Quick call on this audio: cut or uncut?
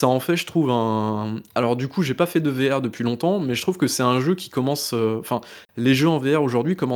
cut